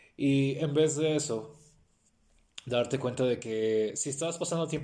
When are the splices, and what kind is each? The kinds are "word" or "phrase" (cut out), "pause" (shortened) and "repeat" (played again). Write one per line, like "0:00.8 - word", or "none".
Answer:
none